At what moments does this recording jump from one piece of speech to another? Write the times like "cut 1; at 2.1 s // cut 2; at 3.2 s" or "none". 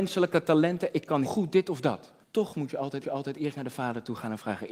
cut 1; at 1.2 s // cut 2; at 2.2 s // cut 3; at 3.0 s